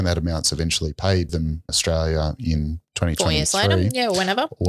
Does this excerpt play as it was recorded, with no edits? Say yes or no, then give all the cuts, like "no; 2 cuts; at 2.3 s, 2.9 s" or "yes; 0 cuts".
no; 2 cuts; at 1.3 s, 1.7 s